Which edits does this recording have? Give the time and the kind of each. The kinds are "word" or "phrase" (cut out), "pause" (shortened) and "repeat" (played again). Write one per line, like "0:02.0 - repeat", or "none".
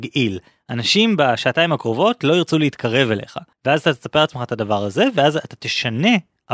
0:03.5 - pause

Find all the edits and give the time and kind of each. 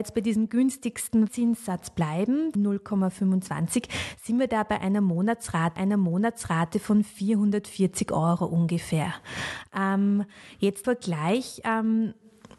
0:01.3 - word
0:02.6 - word
0:05.8 - repeat
0:10.8 - word

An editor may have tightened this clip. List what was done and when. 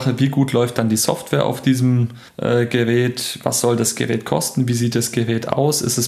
0:02.3 - pause

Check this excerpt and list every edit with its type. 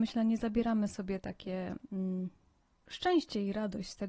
0:02.6 - pause

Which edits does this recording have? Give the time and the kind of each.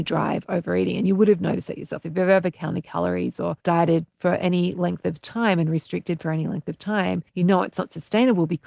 0:03.6 - pause
0:07.3 - pause

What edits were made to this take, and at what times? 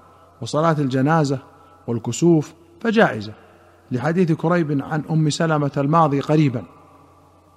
none

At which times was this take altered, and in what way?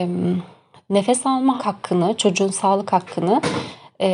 0:01.6 - phrase

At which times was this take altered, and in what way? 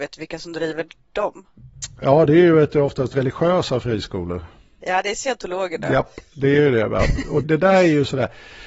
0:07.4 - word

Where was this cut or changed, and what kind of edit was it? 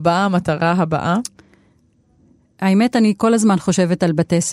none

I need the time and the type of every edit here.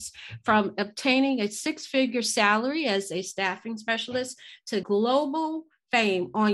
0:04.8 - word

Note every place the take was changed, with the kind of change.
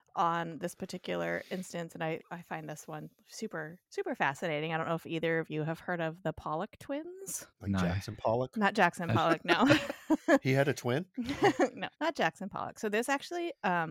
0:03.9 - pause
0:07.5 - pause
0:11.9 - pause

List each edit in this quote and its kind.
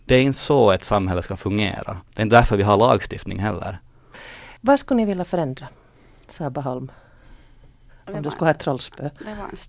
0:02.1 - pause
0:04.6 - pause

